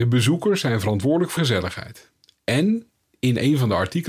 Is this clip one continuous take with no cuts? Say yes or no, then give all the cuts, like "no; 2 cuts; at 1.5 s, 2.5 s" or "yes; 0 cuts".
no; 1 cut; at 1.4 s